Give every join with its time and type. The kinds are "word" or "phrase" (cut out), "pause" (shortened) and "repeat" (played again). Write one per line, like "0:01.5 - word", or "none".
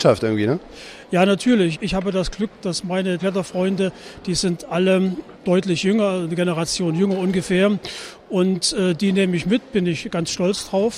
0:01.7 - word
0:03.2 - word